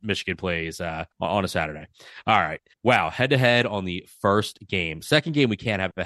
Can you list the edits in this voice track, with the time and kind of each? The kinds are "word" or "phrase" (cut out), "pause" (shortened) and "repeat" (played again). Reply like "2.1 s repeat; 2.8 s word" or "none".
1.1 s pause; 2.7 s pause